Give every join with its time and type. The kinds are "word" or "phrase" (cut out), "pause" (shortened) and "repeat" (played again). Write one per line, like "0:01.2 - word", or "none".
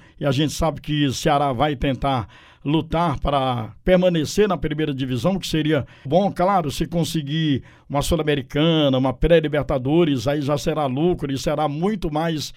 0:06.1 - word

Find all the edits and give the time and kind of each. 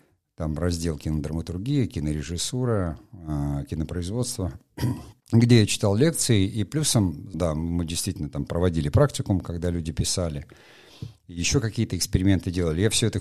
0:05.2 - pause
0:07.3 - word

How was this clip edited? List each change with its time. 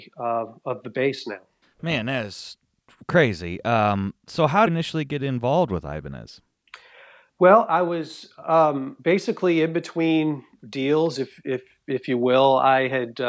0:01.6 - pause
0:04.7 - phrase
0:09.0 - pause

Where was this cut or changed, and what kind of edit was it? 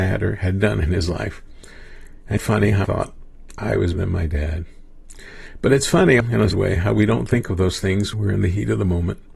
0:02.4 - word
0:02.8 - word
0:03.9 - word
0:06.2 - word
0:06.5 - word
0:08.1 - word

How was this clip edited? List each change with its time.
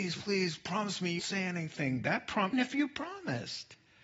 0:01.2 - word
0:02.5 - word

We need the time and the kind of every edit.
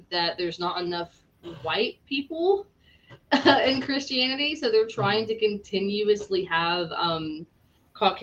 none

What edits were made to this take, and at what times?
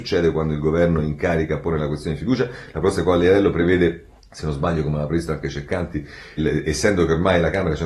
0:04.2 - pause
0:06.4 - word

